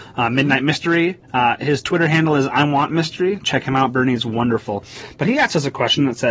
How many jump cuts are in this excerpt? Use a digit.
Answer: 1